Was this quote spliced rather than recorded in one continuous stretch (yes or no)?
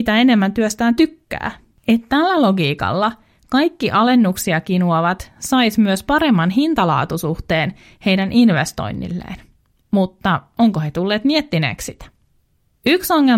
no